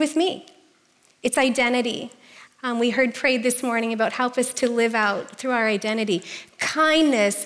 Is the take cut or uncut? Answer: uncut